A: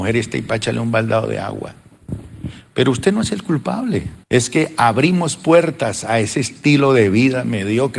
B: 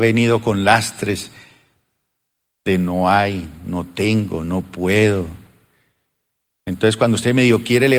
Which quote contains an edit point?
A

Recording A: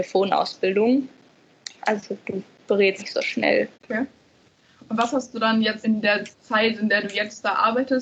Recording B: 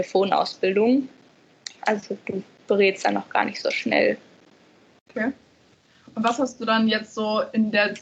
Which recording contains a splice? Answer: A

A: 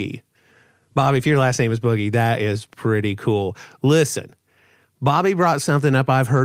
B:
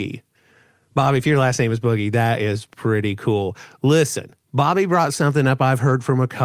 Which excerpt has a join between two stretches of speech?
B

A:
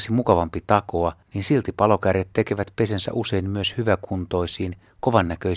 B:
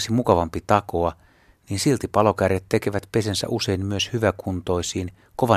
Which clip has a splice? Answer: A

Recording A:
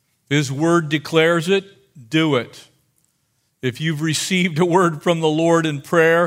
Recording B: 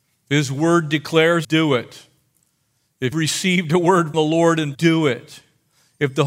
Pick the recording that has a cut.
B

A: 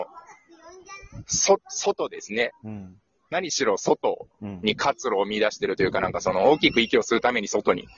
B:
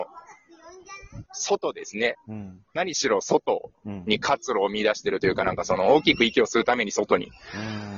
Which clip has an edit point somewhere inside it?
B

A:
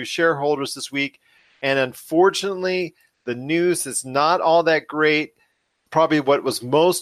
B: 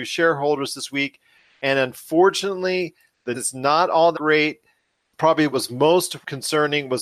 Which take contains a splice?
B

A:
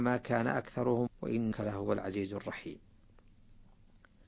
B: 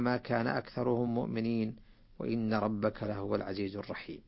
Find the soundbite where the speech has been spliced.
A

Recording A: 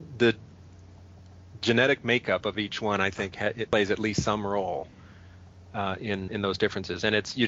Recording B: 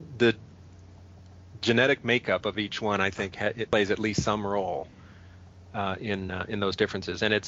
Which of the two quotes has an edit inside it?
A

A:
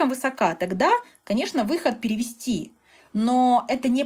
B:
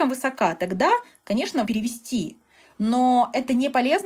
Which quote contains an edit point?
B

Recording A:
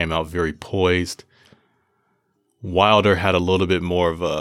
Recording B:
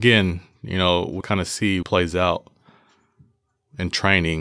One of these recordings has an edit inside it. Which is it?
B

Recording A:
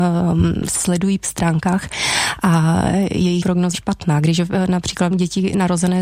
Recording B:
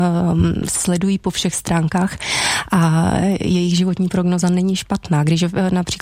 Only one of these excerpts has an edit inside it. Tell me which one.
A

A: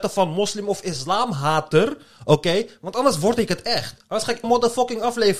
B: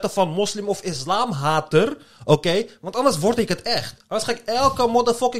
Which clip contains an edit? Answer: A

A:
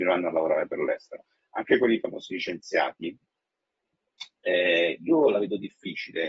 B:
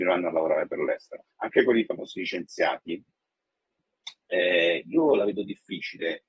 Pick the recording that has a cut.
B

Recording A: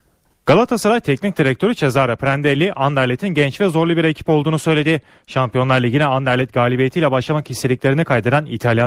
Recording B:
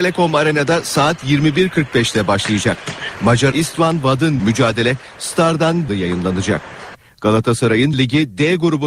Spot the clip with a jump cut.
B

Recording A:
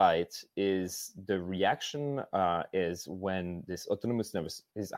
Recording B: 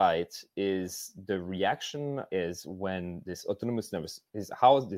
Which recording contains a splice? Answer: B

